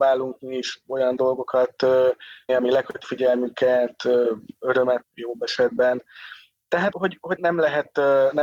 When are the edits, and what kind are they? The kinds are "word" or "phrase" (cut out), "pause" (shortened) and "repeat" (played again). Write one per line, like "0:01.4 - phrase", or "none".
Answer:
0:02.5 - word
0:03.0 - word
0:05.0 - word
0:06.9 - word
0:07.4 - word